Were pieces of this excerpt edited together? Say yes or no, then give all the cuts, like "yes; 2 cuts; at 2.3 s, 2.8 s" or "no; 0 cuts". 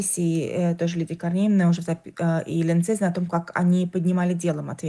no; 0 cuts